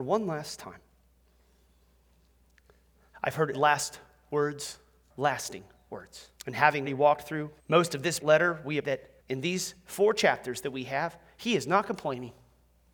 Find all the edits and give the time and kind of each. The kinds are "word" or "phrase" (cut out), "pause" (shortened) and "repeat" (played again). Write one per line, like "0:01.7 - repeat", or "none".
0:03.5 - word
0:05.1 - word
0:06.4 - pause
0:06.9 - word
0:07.6 - pause
0:08.2 - word
0:08.8 - word
0:09.2 - pause